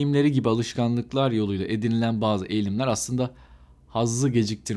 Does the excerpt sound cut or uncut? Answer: uncut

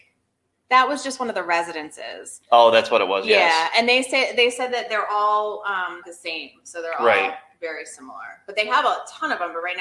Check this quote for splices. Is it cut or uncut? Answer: cut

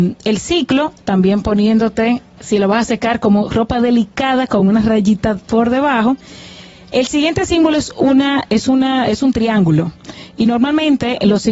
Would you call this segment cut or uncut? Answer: uncut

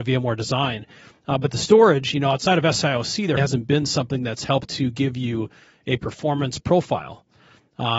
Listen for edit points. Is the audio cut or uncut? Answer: cut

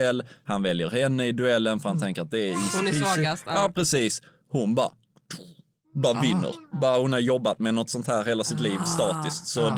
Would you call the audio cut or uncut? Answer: uncut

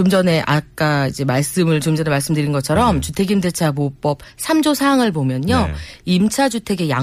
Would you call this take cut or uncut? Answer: uncut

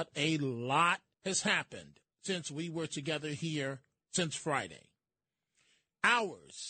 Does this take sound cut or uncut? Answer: cut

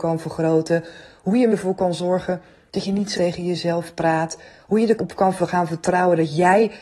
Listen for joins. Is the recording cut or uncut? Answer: cut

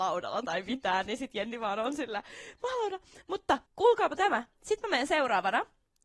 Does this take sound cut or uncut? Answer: cut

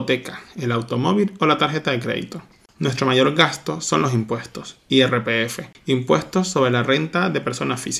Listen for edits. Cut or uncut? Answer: uncut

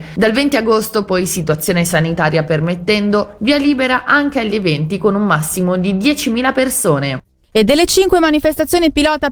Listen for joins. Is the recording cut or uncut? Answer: uncut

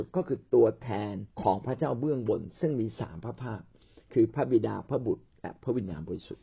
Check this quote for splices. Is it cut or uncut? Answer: cut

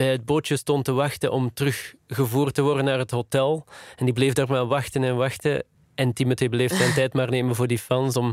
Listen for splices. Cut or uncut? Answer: cut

